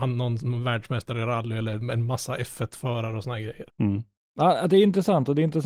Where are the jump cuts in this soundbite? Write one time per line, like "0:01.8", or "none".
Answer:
0:03.7